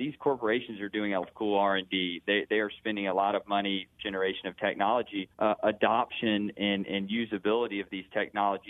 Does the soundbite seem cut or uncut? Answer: cut